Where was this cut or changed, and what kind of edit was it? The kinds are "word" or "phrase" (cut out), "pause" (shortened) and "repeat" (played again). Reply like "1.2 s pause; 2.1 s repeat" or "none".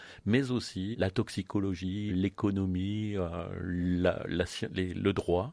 0.9 s word; 2.1 s word